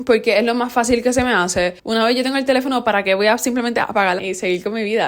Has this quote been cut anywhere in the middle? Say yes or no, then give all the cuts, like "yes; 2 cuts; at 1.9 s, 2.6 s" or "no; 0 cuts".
yes; 2 cuts; at 1.8 s, 4.2 s